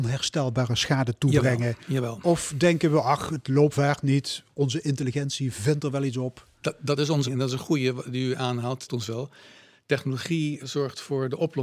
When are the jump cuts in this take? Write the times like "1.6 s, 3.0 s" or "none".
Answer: 3.7 s, 7.2 s, 8.9 s, 10.6 s